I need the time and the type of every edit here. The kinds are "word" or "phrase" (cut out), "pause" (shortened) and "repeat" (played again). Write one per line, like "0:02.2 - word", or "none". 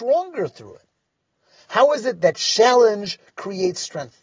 none